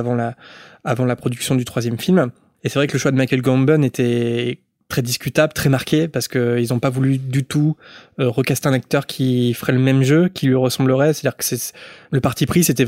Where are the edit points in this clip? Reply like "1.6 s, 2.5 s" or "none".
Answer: none